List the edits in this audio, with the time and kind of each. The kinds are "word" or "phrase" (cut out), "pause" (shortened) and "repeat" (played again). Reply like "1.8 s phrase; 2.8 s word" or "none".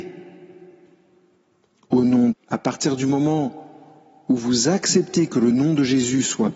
2.3 s phrase